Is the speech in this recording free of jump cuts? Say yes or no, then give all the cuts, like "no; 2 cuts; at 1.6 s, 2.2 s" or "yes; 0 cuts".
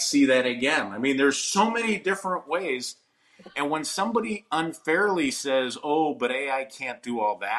yes; 0 cuts